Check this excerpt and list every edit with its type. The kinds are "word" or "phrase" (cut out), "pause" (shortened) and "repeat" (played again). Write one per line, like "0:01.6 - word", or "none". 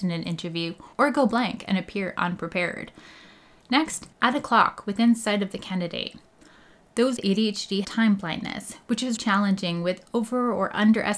0:00.9 - pause
0:04.1 - pause
0:07.2 - word
0:07.8 - word
0:09.2 - word